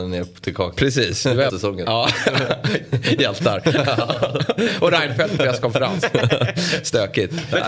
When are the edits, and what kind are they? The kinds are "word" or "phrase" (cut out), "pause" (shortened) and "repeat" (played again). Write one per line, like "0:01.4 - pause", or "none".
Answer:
0:01.5 - phrase
0:05.4 - phrase